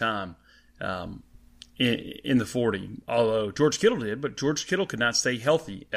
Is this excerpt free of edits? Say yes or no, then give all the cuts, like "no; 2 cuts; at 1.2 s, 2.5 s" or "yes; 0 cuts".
yes; 0 cuts